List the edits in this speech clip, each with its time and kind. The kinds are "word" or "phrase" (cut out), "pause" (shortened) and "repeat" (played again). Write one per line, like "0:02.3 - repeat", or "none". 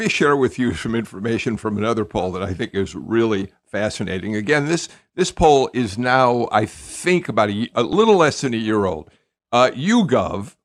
none